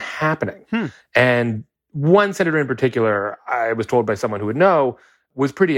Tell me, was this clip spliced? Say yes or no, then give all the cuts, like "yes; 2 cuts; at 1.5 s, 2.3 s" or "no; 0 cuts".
no; 0 cuts